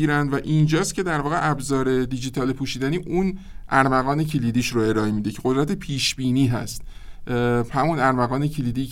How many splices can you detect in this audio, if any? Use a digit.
0